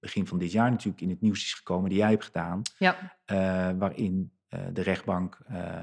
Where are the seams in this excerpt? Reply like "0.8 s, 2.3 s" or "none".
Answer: none